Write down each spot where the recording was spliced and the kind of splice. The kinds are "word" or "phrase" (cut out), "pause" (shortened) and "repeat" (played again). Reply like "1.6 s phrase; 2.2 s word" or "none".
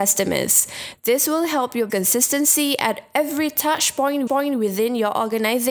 1.9 s word; 4.3 s repeat